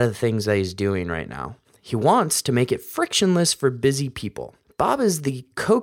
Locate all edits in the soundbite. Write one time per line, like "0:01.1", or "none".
none

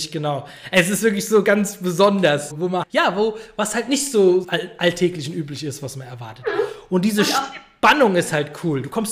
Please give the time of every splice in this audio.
0:02.5
0:02.8
0:04.4

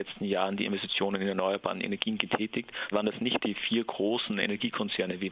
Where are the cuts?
0:02.9

